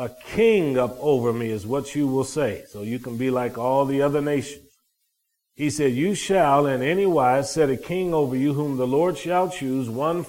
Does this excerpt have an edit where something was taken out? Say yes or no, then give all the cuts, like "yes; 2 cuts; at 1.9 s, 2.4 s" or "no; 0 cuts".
no; 0 cuts